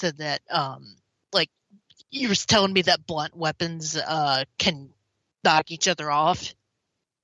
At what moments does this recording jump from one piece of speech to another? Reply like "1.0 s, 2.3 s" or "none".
none